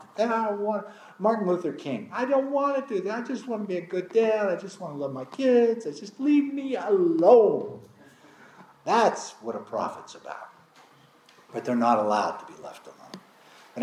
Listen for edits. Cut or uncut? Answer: uncut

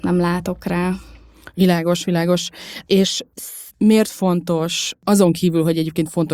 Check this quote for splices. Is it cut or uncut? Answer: cut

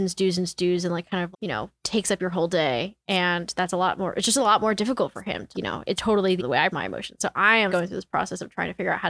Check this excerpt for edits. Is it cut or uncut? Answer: cut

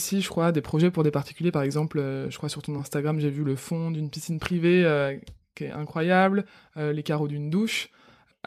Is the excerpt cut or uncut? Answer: uncut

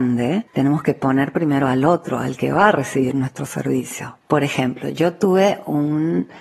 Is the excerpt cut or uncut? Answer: uncut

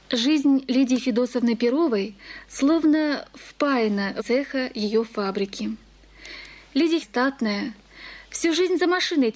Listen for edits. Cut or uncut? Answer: cut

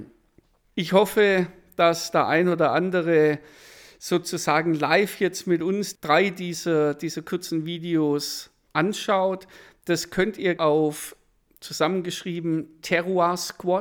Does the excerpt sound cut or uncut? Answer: cut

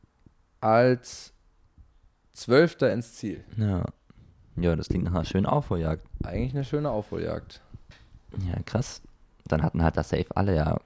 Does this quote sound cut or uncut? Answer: uncut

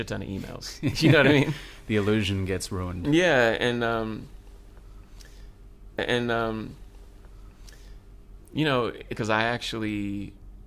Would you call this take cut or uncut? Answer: cut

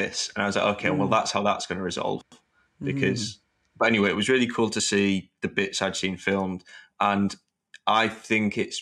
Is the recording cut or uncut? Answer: uncut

